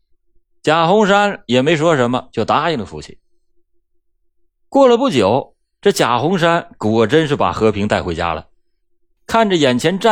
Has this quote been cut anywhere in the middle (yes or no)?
no